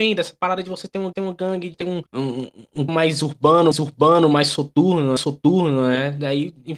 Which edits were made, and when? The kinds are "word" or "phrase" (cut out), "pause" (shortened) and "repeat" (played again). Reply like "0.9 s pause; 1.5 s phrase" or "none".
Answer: 1.1 s repeat; 1.7 s word; 2.1 s pause; 2.9 s word; 3.7 s repeat; 5.2 s repeat